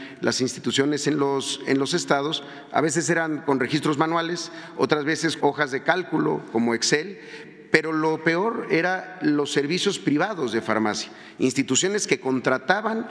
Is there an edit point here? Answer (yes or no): yes